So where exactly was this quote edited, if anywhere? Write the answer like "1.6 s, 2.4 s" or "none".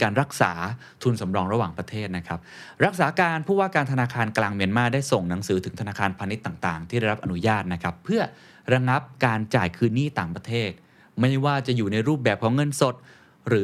none